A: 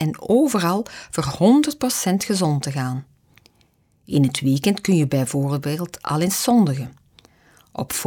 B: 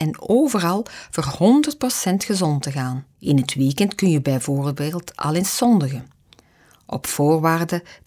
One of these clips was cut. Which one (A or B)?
B